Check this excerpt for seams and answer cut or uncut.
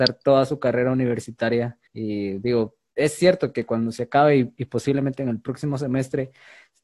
cut